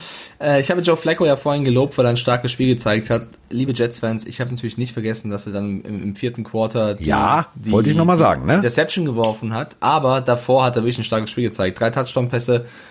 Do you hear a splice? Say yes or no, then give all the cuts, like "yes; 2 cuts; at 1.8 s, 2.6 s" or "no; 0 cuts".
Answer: no; 0 cuts